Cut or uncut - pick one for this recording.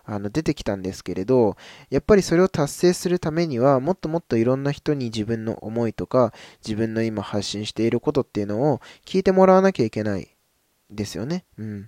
uncut